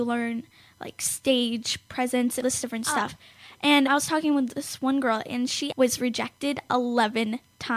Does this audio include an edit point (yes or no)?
yes